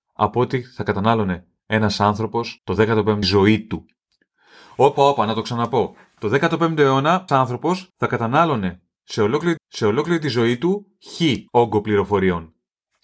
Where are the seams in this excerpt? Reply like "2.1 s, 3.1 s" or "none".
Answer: 2.6 s, 3.2 s, 5.0 s, 7.3 s, 7.9 s, 9.6 s, 11.5 s